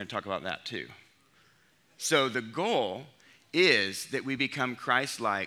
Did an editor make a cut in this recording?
no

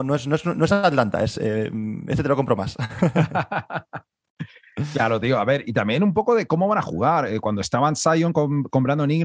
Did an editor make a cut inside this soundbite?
no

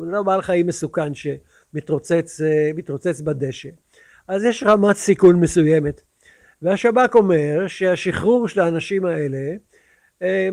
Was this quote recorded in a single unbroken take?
yes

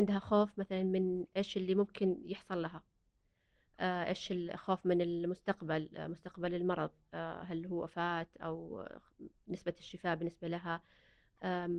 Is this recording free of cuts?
yes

